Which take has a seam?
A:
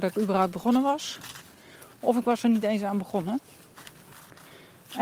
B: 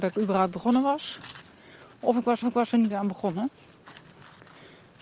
B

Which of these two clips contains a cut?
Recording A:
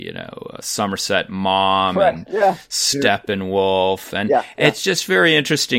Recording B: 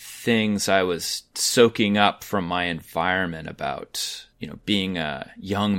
B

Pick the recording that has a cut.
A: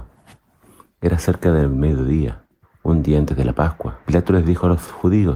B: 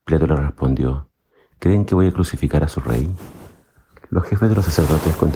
A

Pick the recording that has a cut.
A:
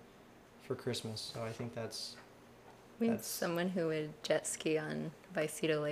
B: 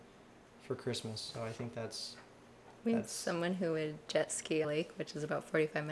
B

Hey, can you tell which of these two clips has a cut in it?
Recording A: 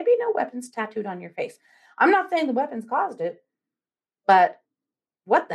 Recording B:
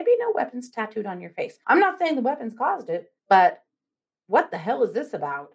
B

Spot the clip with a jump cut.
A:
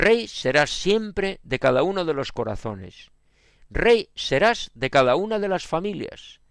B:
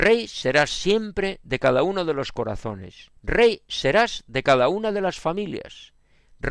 B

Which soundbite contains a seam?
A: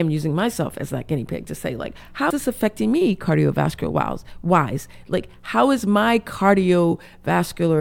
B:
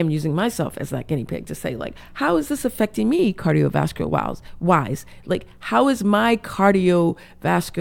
A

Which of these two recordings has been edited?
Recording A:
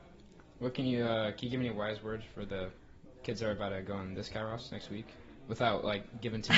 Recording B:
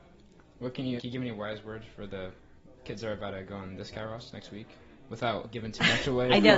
B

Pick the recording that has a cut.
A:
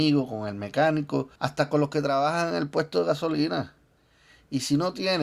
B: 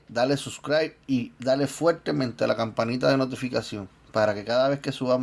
A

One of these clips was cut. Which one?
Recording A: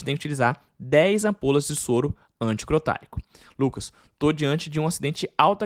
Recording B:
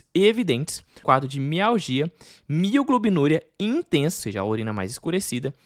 B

